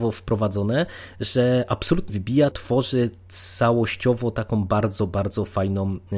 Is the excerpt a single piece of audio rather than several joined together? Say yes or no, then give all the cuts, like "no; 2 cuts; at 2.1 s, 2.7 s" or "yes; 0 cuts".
no; 2 cuts; at 2.1 s, 2.5 s